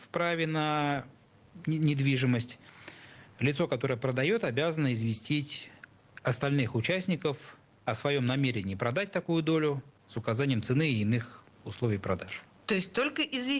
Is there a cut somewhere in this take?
no; 0 cuts

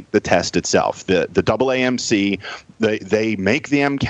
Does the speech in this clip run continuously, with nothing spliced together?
yes; 0 cuts

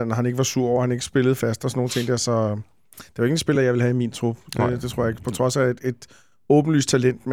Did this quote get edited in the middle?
no; 0 cuts

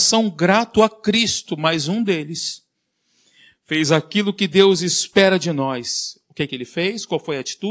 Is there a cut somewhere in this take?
no; 0 cuts

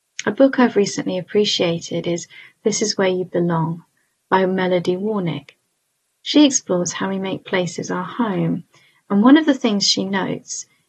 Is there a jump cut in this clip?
no; 0 cuts

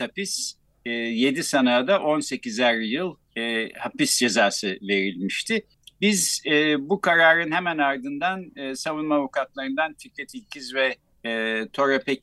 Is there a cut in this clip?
yes; 3 cuts; at 3.2 s, 5.7 s, 11.1 s

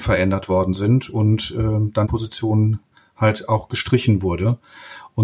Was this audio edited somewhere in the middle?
yes; 1 cut; at 2.0 s

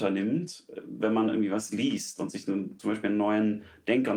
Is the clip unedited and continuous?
yes; 0 cuts

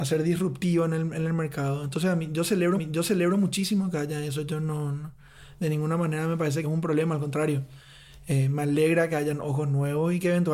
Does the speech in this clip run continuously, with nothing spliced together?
no; 2 cuts; at 2.8 s, 6.6 s

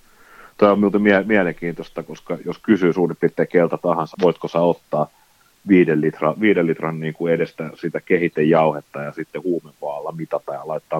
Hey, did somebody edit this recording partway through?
yes; 2 cuts; at 2.6 s, 4.1 s

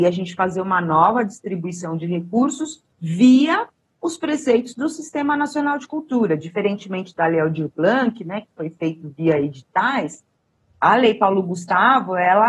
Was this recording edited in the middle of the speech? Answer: yes; 1 cut; at 2.9 s

